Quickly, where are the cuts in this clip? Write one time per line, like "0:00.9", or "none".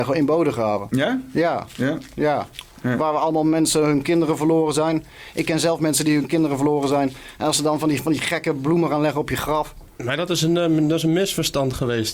0:09.9